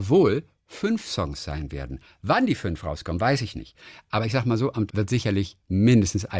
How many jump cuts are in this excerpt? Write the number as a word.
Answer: one